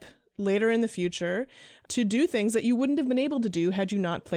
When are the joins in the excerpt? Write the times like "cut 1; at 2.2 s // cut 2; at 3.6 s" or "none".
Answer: none